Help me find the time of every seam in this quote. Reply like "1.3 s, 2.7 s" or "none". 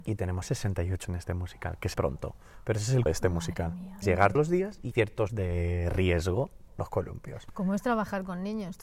1.0 s, 1.9 s, 3.1 s, 4.0 s, 4.3 s, 4.9 s, 5.3 s, 6.7 s